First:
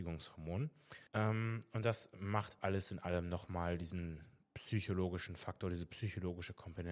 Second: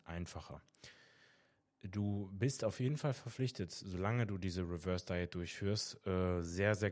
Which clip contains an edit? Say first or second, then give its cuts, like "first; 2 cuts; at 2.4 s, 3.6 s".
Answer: first; 2 cuts; at 1.1 s, 2.6 s